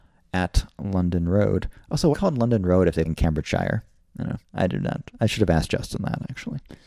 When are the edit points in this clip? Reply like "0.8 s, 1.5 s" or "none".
2.1 s, 3.0 s, 4.0 s, 4.4 s